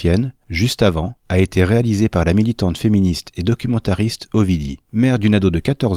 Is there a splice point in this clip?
yes; 2 cuts; at 1.2 s, 4.8 s

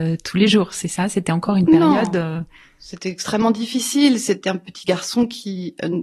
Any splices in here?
no; 0 cuts

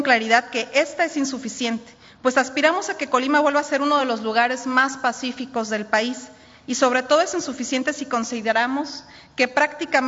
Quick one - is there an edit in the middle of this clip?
no; 0 cuts

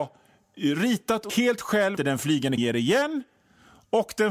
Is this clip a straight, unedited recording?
no; 3 cuts; at 1.3 s, 2.0 s, 2.6 s

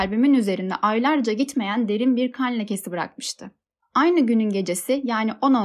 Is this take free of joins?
yes; 0 cuts

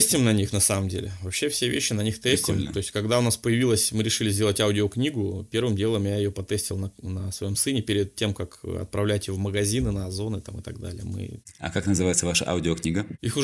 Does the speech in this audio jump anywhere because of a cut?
no; 0 cuts

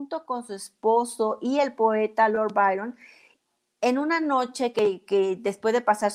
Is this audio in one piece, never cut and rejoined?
yes; 0 cuts

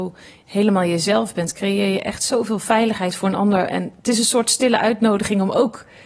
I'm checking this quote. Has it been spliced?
no; 0 cuts

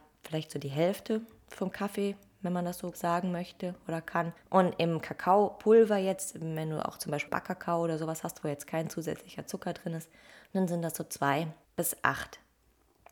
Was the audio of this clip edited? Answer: yes; 4 cuts; at 2.9 s, 4.4 s, 7.3 s, 11.6 s

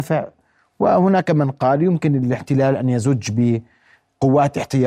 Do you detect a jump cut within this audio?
no; 0 cuts

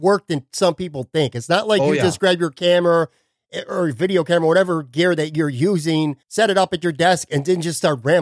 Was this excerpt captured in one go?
no; 1 cut; at 6.2 s

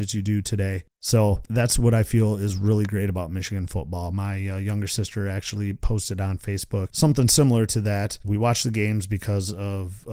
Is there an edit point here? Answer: yes; 1 cut; at 0.9 s

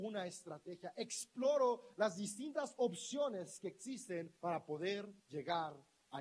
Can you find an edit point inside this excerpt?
yes; 2 cuts; at 4.4 s, 5.2 s

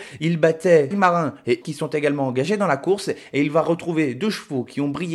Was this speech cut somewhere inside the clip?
yes; 2 cuts; at 0.9 s, 1.6 s

